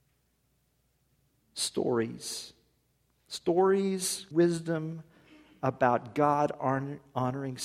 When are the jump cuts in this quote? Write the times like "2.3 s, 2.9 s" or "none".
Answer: 4.3 s